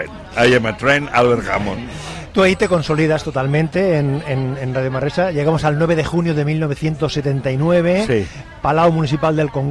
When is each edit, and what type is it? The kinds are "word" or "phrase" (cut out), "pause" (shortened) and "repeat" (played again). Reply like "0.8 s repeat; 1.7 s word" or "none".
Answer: none